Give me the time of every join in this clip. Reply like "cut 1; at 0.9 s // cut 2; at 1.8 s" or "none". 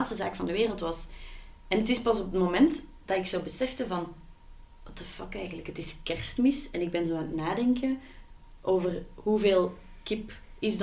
none